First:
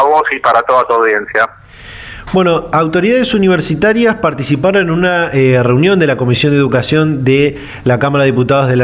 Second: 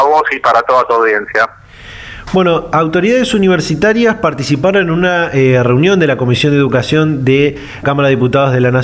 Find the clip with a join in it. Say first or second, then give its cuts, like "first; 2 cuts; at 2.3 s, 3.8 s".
second; 1 cut; at 7.8 s